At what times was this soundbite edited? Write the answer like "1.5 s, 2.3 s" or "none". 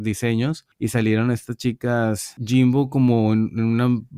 none